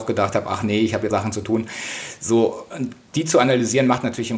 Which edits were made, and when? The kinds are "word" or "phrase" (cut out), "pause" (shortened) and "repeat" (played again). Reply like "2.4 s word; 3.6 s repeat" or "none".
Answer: 1.1 s word; 3.1 s word